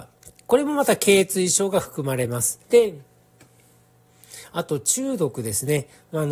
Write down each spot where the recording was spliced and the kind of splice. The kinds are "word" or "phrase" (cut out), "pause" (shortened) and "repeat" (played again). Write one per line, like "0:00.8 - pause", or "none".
0:02.6 - pause